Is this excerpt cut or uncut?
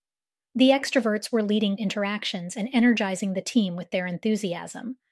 cut